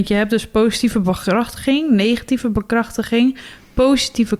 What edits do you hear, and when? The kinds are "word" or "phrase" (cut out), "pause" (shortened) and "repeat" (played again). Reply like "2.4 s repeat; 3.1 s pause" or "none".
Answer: none